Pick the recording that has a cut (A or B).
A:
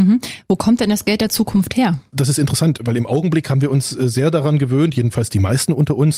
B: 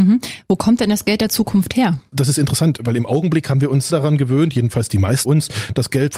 B